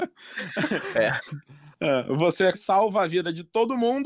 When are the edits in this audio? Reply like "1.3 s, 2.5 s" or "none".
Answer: 2.5 s